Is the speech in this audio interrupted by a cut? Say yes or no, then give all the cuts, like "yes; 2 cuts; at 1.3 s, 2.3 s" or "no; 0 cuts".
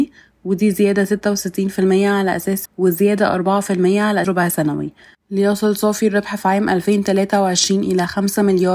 yes; 2 cuts; at 2.7 s, 4.2 s